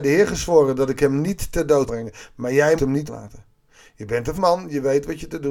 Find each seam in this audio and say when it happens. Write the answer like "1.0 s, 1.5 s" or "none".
1.9 s, 2.8 s, 3.1 s, 4.3 s